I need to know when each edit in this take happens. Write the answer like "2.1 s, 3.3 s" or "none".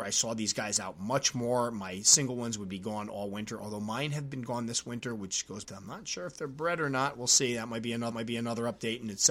5.6 s, 8.1 s